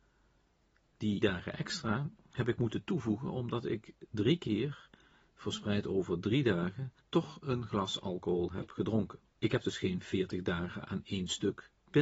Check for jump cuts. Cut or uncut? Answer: cut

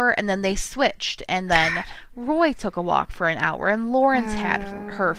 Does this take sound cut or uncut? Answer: uncut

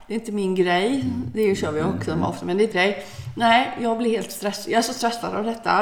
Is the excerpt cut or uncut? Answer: cut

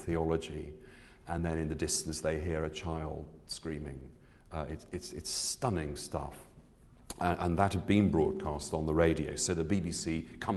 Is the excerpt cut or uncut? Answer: uncut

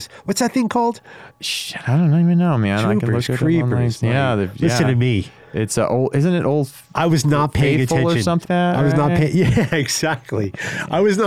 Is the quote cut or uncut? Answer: cut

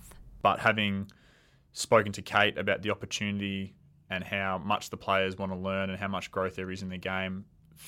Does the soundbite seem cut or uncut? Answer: uncut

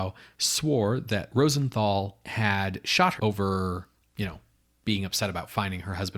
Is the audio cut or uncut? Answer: cut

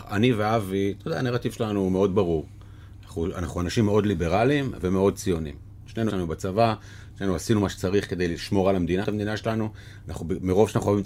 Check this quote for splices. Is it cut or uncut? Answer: cut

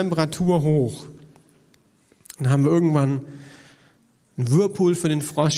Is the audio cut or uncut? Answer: uncut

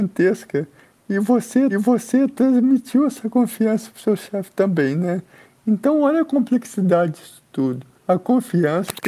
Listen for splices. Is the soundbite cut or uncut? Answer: cut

